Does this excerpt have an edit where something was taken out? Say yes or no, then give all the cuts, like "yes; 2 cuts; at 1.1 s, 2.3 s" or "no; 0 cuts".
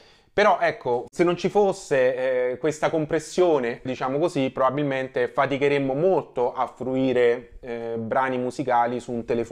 yes; 1 cut; at 3.9 s